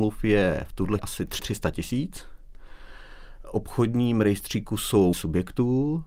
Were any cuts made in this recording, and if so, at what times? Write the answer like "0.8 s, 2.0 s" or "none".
1.0 s, 1.4 s, 5.1 s

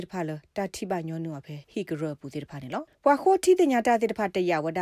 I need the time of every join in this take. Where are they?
1.6 s, 2.9 s

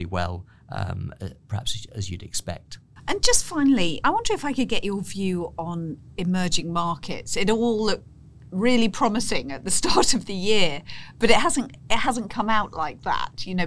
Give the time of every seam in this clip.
4.0 s, 12.3 s

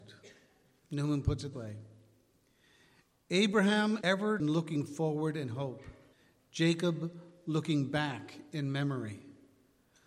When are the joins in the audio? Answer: 1.5 s, 4.0 s, 4.4 s, 6.1 s

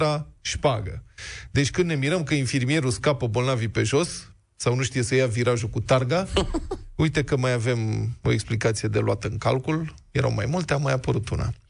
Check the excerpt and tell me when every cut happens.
none

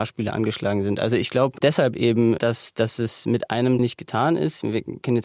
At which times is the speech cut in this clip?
2.4 s, 3.8 s

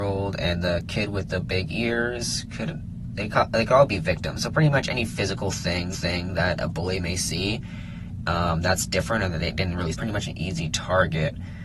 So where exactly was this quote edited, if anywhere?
3.3 s, 5.9 s, 9.9 s

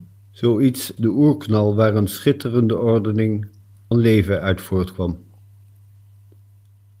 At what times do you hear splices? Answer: 1.0 s, 3.9 s

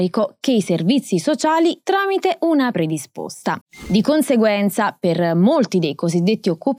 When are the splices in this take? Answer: 1.8 s, 2.7 s

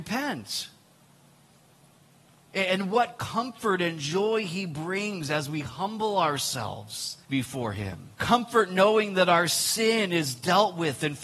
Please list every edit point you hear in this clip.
7.2 s, 8.1 s

